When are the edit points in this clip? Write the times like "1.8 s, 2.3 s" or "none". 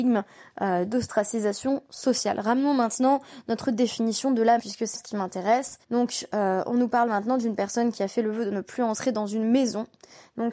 4.6 s, 4.9 s, 5.8 s